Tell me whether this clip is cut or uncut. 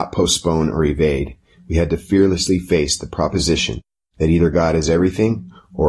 uncut